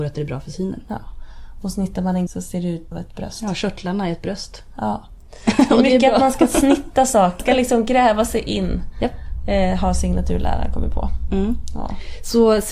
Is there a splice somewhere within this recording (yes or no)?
yes